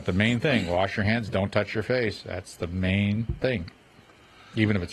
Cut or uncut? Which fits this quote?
uncut